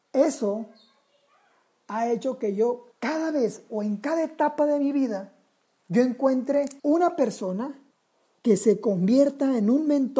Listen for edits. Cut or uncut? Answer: cut